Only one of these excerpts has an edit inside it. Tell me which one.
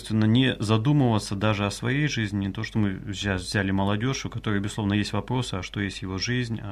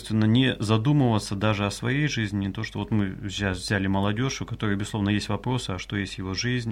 first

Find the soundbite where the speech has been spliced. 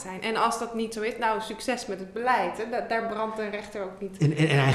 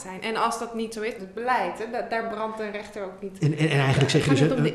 second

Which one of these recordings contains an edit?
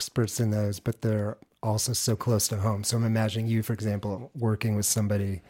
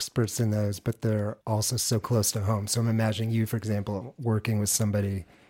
second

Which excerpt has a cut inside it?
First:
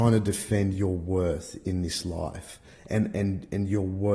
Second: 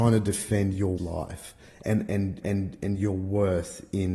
second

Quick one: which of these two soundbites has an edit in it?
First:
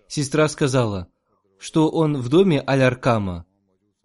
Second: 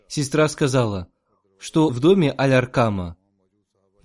second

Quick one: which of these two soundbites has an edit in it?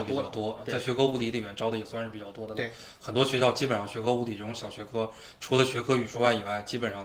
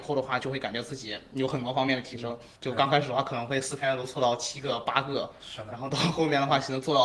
second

